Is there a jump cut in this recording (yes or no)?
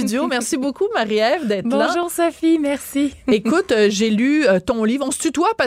no